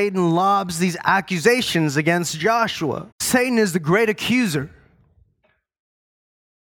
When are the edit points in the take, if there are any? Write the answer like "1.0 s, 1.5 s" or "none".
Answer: 3.1 s